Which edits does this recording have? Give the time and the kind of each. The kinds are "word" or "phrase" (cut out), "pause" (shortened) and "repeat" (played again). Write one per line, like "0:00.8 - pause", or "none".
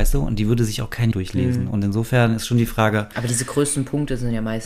0:01.1 - word